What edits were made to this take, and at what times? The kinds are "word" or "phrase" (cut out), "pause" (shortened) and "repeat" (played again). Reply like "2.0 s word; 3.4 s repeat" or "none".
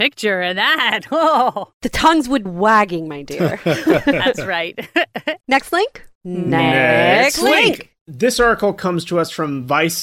2.5 s word; 5.4 s pause; 6.2 s pause